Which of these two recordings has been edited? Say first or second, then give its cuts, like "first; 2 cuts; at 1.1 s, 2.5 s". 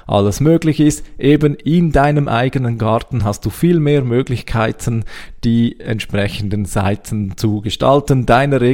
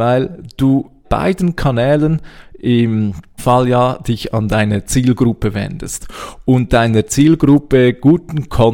second; 2 cuts; at 1.0 s, 3.4 s